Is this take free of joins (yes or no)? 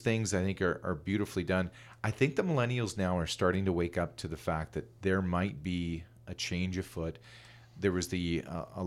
yes